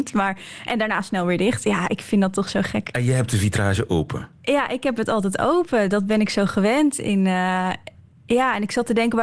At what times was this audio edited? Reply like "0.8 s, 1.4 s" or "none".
none